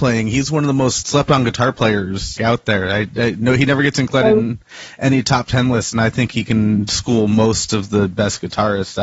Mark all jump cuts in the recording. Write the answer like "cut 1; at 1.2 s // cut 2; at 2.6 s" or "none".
cut 1; at 1.0 s // cut 2; at 2.4 s